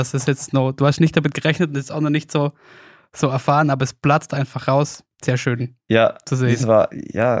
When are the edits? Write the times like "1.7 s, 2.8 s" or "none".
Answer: 5.1 s